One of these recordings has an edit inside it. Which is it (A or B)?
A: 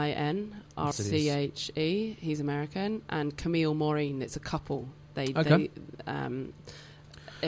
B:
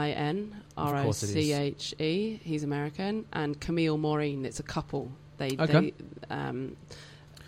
A